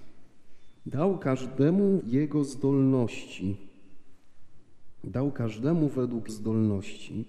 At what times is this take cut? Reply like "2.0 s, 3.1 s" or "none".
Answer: 2.0 s, 6.3 s